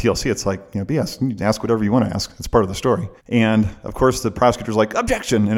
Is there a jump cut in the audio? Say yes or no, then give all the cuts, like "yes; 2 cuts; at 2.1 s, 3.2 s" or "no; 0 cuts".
yes; 1 cut; at 3.2 s